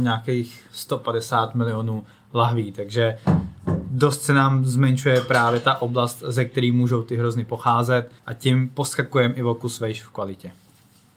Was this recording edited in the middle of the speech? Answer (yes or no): yes